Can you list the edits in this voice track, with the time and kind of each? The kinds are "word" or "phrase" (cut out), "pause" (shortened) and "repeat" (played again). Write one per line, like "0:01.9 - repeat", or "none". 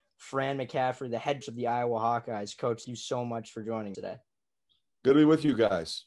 0:01.4 - word
0:02.8 - word
0:03.9 - word